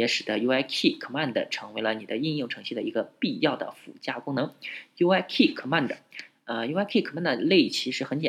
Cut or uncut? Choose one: uncut